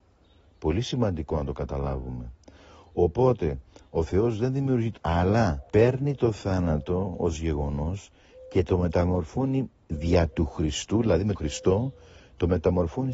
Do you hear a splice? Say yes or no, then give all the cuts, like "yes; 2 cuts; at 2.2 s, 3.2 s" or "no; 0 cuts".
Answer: yes; 3 cuts; at 5.0 s, 5.7 s, 11.3 s